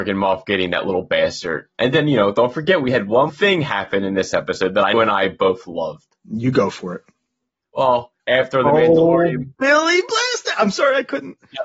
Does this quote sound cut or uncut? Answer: cut